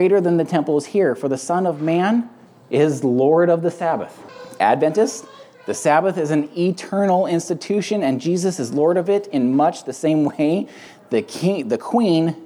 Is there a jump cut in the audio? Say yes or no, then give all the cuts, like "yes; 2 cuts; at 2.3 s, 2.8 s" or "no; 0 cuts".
no; 0 cuts